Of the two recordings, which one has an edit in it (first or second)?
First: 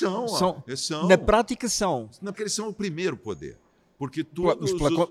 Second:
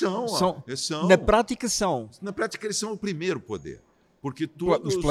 first